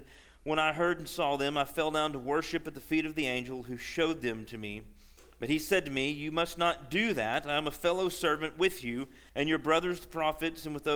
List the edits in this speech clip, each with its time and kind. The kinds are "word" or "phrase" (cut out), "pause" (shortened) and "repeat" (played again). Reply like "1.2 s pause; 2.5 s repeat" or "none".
9.3 s pause